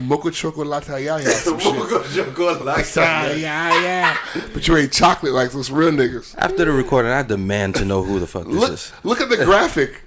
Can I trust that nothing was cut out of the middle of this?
yes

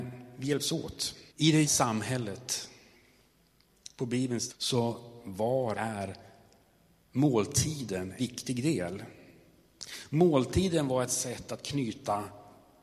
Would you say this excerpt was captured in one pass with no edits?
no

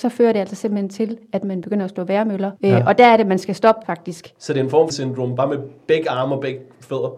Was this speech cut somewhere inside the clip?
yes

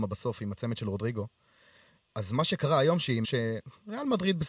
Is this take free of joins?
no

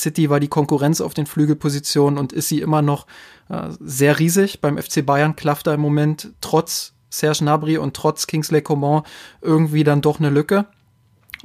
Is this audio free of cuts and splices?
yes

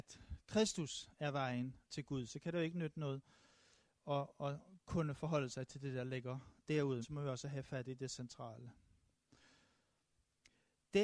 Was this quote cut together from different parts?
yes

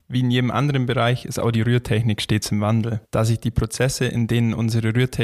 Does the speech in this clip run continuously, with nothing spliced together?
no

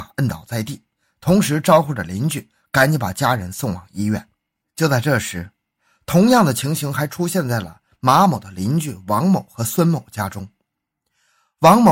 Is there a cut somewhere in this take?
no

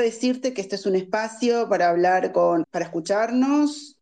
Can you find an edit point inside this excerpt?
yes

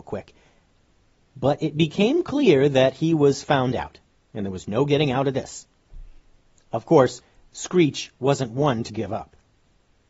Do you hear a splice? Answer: yes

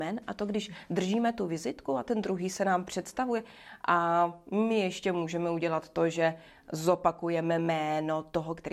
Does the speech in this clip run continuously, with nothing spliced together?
yes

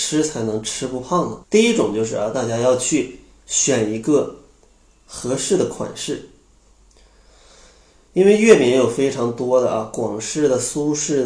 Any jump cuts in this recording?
yes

